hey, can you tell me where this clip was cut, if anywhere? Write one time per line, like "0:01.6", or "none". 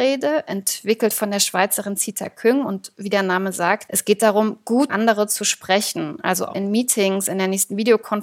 0:03.9
0:04.9
0:06.5